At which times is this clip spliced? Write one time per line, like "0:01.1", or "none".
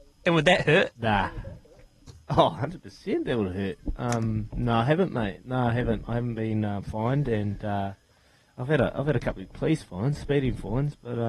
none